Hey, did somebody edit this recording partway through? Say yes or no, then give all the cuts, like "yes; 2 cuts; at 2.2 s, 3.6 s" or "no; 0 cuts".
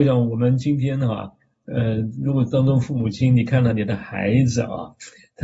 no; 0 cuts